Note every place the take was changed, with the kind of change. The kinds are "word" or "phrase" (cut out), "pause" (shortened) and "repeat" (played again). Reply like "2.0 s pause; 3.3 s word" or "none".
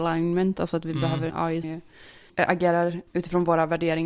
1.3 s word; 1.6 s word